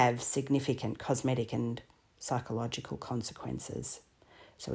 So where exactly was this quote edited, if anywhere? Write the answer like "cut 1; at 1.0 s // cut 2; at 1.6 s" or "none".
none